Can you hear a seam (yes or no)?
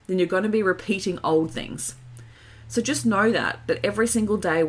no